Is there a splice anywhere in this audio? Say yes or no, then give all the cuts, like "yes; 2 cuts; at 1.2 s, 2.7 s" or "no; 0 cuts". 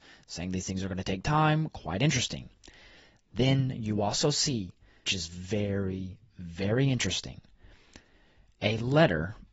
yes; 1 cut; at 5.0 s